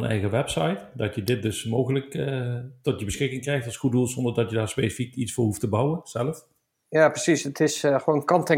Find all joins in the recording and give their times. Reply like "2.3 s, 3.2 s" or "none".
none